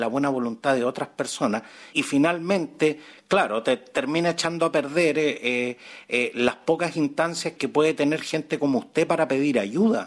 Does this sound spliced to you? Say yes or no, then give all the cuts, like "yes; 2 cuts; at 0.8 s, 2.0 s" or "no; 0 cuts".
yes; 2 cuts; at 1.9 s, 7.6 s